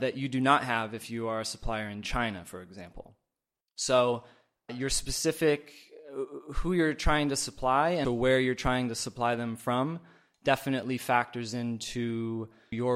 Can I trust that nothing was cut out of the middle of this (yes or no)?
no